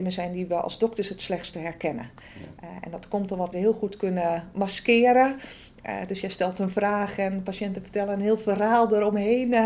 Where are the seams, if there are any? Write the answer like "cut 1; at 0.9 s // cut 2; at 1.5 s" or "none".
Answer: cut 1; at 3.5 s